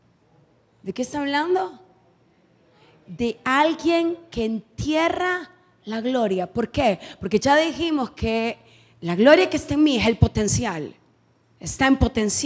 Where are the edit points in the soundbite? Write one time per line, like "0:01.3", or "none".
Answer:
none